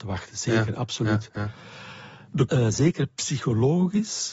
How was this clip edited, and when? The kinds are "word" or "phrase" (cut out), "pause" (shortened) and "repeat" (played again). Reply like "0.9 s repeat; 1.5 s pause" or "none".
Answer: 2.5 s word